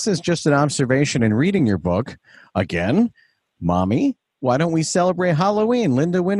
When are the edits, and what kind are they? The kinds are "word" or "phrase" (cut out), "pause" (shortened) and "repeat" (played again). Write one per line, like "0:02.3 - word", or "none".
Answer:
none